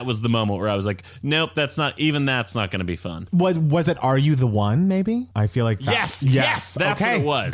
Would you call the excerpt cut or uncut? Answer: cut